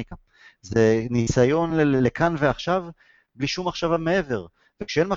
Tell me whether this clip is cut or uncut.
uncut